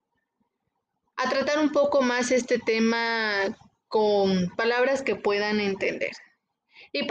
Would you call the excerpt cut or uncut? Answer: uncut